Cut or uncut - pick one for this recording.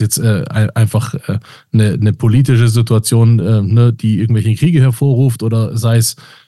uncut